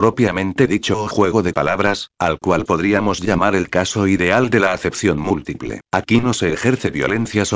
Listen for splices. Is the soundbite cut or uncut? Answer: cut